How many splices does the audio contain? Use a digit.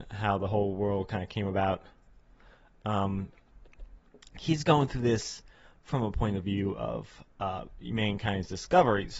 0